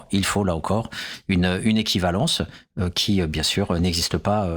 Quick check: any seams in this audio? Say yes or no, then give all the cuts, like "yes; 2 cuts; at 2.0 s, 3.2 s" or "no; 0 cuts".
no; 0 cuts